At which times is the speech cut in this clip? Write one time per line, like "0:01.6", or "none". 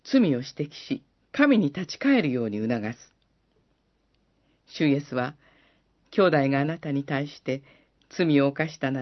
0:01.1